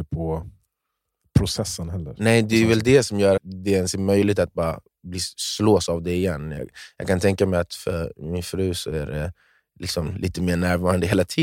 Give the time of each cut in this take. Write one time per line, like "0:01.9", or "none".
0:03.4